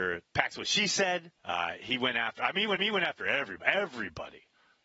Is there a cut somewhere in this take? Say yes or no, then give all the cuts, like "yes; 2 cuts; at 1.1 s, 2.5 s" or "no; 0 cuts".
yes; 2 cuts; at 1.3 s, 2.8 s